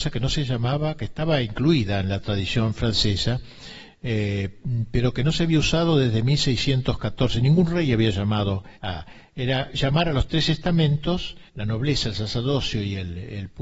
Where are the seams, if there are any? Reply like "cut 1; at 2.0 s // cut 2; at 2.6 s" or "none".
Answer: cut 1; at 8.8 s // cut 2; at 11.5 s